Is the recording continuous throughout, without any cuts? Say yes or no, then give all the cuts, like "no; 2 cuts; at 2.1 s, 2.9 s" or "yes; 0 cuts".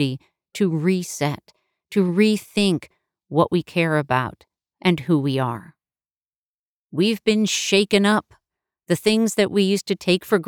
yes; 0 cuts